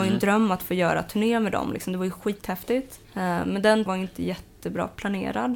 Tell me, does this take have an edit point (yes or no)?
yes